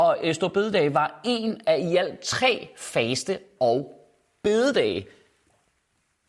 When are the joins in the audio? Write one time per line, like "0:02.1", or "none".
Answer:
none